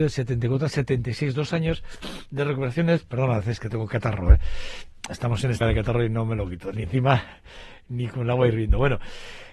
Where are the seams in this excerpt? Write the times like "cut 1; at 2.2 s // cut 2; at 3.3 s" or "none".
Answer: cut 1; at 5.6 s // cut 2; at 6.8 s